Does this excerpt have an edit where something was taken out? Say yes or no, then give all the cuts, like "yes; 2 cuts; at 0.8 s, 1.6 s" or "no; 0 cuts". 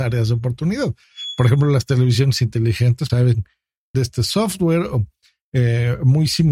yes; 2 cuts; at 3.1 s, 3.9 s